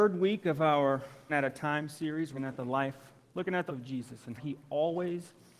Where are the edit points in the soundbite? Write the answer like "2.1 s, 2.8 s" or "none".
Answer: 1.3 s, 2.4 s, 3.7 s, 4.4 s